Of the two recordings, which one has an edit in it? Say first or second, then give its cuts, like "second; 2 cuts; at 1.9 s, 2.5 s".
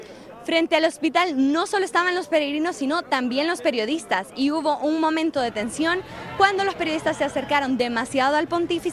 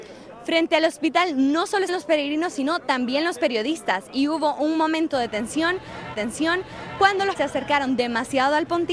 second; 3 cuts; at 1.9 s, 6.1 s, 7.4 s